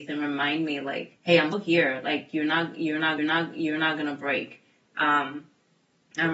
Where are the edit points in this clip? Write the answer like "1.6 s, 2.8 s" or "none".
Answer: 1.2 s, 1.5 s, 3.2 s

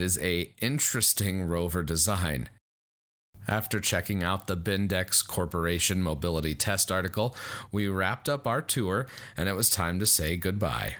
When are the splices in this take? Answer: none

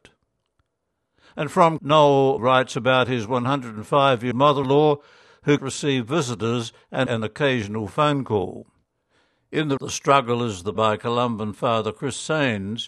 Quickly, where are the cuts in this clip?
1.8 s, 2.4 s, 4.3 s, 4.6 s, 5.6 s, 7.1 s, 9.8 s, 10.8 s

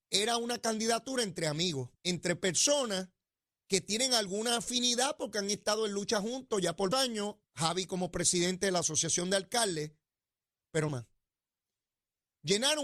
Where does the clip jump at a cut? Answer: 1.9 s, 6.9 s, 7.4 s, 10.9 s

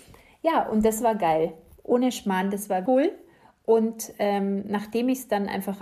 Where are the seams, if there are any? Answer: 2.9 s

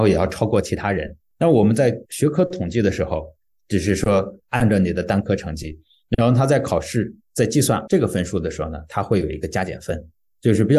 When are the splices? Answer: 7.9 s

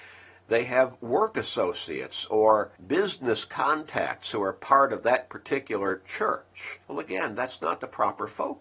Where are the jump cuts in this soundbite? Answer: 2.8 s, 6.8 s

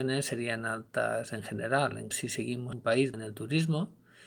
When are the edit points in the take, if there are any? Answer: 2.1 s, 2.7 s, 3.1 s

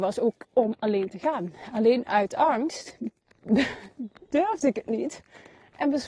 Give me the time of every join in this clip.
3.2 s

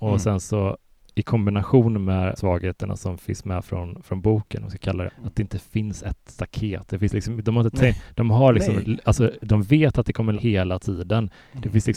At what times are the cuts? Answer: 2.4 s, 5.1 s, 9.4 s, 10.3 s

